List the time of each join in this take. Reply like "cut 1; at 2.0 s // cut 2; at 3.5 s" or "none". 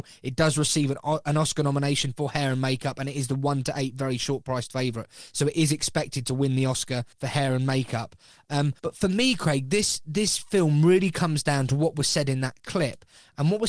cut 1; at 7.1 s // cut 2; at 8.8 s

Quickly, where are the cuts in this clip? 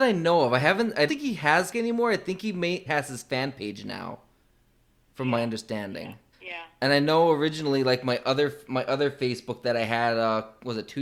cut 1; at 1.1 s // cut 2; at 1.7 s // cut 3; at 2.9 s // cut 4; at 6.3 s

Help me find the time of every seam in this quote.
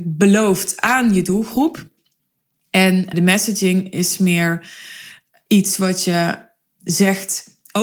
cut 1; at 3.1 s

